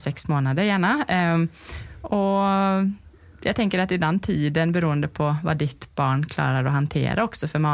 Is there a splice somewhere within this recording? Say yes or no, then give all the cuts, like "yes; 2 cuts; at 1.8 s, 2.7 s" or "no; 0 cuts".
no; 0 cuts